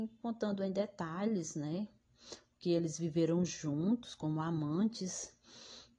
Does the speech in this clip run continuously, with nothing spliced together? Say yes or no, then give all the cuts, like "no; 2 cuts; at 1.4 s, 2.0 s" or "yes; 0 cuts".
yes; 0 cuts